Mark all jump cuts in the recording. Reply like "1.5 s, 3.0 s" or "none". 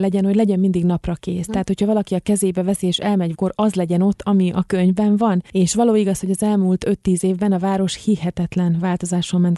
3.3 s